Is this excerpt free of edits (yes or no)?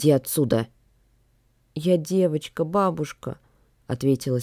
yes